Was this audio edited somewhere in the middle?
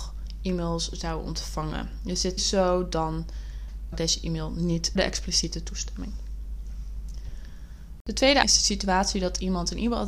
yes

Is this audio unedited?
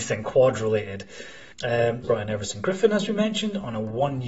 no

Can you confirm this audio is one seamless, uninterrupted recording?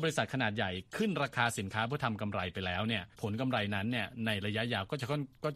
no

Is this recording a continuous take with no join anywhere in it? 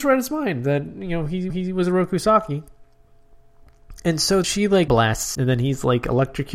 no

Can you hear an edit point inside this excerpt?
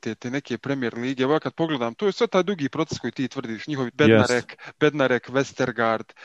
yes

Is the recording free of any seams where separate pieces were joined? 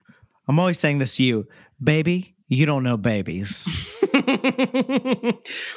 yes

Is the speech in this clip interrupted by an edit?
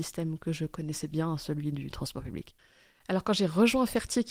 no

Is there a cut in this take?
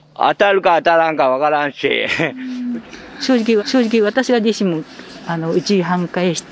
yes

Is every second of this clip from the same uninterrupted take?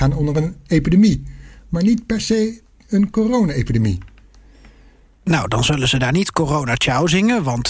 yes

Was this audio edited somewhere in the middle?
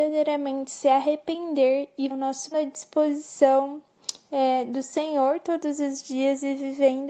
yes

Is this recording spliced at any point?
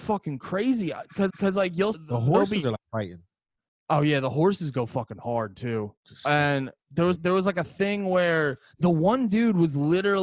yes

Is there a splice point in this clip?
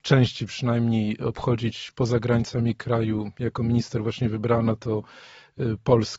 no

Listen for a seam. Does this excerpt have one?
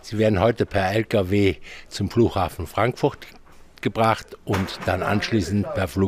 no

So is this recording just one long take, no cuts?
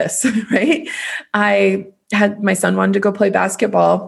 yes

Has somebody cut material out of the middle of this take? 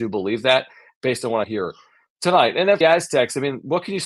yes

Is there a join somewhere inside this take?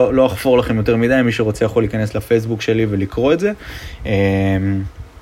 no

